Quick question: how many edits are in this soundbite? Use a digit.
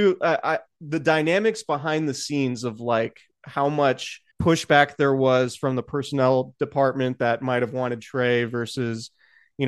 1